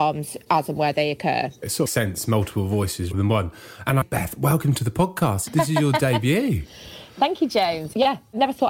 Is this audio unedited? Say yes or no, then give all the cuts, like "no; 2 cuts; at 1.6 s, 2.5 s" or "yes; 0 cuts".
no; 3 cuts; at 1.9 s, 3.1 s, 4.0 s